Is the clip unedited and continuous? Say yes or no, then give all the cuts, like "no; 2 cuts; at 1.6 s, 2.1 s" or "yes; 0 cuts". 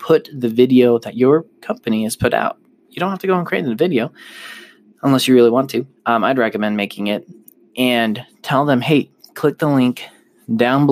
no; 1 cut; at 6.0 s